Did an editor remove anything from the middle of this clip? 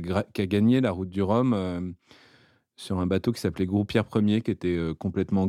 no; 0 cuts

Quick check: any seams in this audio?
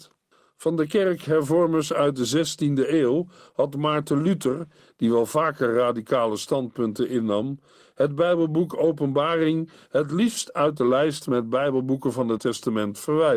yes; 1 cut; at 12.4 s

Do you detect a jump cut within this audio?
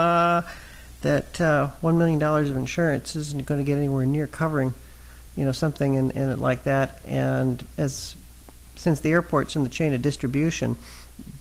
no; 0 cuts

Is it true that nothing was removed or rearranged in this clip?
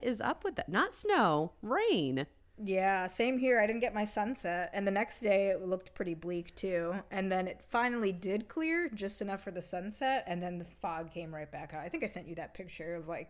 no; 1 cut; at 2.5 s

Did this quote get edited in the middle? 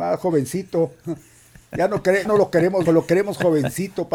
yes; 2 cuts; at 2.3 s, 2.9 s

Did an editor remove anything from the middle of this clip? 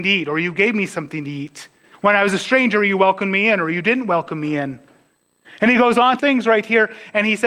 yes; 2 cuts; at 1.9 s, 6.2 s

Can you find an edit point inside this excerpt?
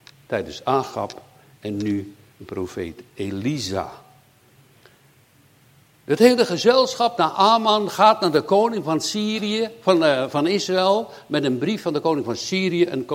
yes; 1 cut; at 7.2 s

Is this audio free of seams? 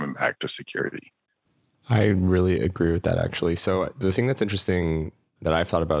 yes; 0 cuts

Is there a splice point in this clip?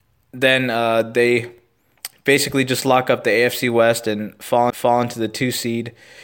yes; 1 cut; at 4.7 s

